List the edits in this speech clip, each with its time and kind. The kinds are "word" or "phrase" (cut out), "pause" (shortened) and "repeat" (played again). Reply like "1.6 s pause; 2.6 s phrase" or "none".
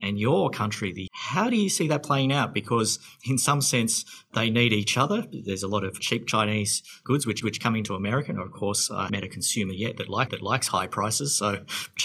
1.1 s word; 7.4 s repeat; 9.1 s word; 10.3 s repeat